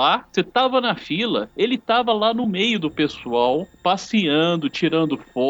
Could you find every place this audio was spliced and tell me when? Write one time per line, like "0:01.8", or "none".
none